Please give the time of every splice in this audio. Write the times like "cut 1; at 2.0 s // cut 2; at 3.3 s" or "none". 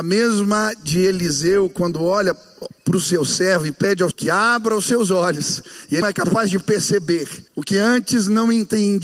cut 1; at 4.1 s // cut 2; at 6.0 s // cut 3; at 7.5 s